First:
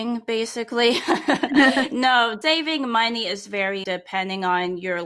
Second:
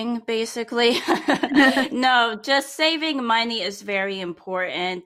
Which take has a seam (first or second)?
first